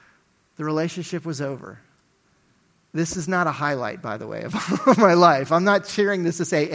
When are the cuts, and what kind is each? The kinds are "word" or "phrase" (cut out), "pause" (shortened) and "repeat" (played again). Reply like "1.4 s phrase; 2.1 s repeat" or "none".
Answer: none